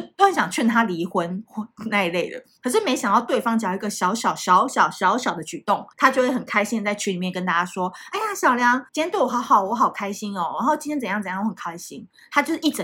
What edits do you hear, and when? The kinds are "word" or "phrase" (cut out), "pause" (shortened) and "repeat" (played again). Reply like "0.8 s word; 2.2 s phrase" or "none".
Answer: 2.6 s pause; 5.9 s pause; 8.9 s pause